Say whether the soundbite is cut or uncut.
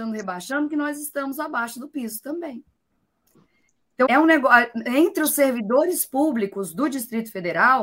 cut